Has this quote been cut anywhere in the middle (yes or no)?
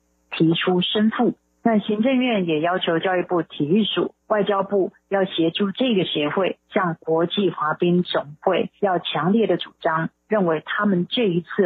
yes